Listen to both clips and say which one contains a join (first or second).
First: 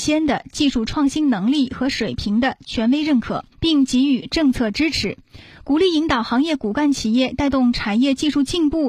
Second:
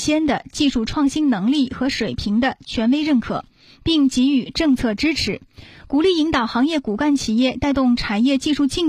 first